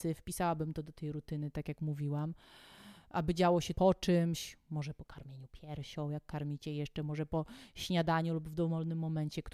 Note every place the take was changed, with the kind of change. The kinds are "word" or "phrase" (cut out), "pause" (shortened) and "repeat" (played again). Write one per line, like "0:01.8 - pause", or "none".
0:03.7 - word